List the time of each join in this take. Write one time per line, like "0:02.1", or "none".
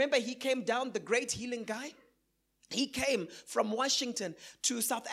none